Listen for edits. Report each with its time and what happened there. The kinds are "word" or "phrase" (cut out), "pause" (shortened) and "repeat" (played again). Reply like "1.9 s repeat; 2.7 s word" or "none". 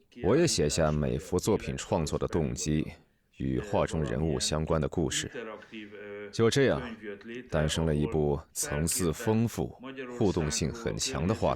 none

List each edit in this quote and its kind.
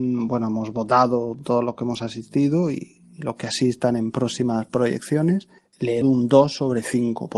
5.6 s pause; 6.0 s word

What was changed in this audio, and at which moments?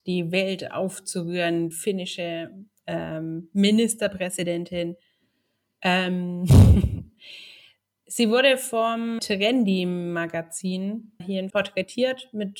1.7 s word; 9.2 s word; 11.2 s word; 11.5 s word

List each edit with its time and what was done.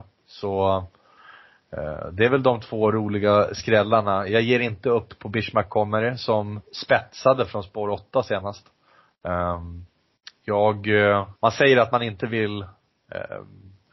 11.4 s pause

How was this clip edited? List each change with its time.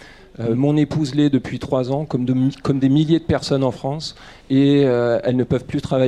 4.4 s pause

